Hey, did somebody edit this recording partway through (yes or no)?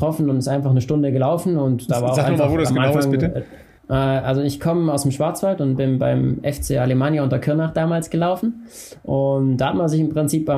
yes